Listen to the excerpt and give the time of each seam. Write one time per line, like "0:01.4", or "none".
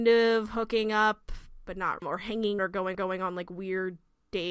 0:02.0
0:02.6
0:02.9